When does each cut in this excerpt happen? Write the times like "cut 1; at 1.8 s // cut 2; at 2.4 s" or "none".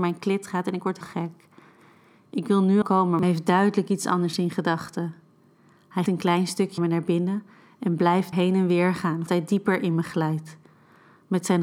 cut 1; at 1.0 s // cut 2; at 2.8 s // cut 3; at 3.2 s // cut 4; at 6.1 s // cut 5; at 6.8 s // cut 6; at 8.3 s // cut 7; at 9.3 s